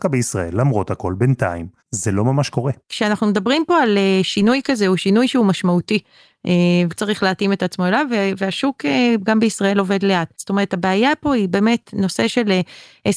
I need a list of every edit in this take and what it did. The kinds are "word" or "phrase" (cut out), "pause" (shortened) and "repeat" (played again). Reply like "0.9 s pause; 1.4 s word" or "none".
1.8 s pause; 2.8 s pause; 6.9 s word; 10.3 s pause